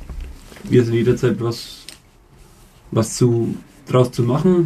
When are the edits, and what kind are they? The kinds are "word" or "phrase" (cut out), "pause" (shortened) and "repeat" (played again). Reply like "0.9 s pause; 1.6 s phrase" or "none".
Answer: 1.4 s word